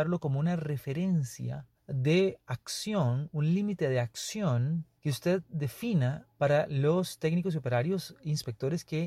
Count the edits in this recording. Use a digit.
3